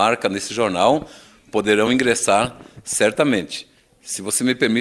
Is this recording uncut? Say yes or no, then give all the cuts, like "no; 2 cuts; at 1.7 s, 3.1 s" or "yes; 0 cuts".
yes; 0 cuts